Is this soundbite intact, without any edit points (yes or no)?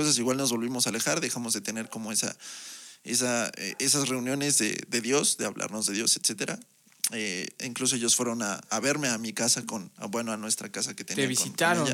yes